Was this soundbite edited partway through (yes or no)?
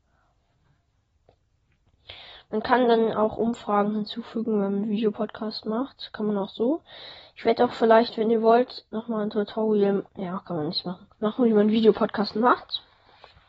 yes